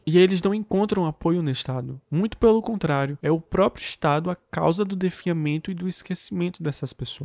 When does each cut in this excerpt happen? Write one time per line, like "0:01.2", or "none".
none